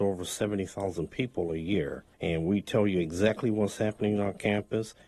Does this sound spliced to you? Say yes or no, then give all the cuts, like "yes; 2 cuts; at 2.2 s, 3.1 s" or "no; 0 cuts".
yes; 1 cut; at 2.1 s